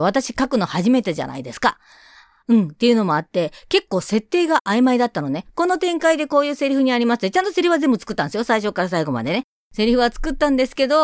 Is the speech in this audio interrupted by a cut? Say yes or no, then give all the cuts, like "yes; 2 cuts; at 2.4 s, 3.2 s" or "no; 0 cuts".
no; 0 cuts